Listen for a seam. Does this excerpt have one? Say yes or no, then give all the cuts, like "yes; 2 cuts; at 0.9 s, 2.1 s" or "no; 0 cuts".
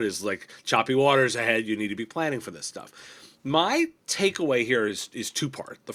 no; 0 cuts